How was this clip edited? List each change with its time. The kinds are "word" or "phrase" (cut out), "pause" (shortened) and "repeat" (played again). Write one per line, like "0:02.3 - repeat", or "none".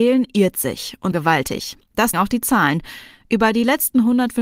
0:01.1 - word
0:02.1 - word